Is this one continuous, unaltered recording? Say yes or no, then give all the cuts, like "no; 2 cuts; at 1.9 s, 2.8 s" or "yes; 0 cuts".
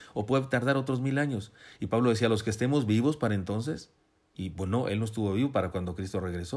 yes; 0 cuts